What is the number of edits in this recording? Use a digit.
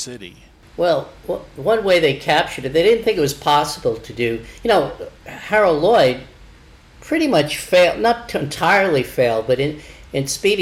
1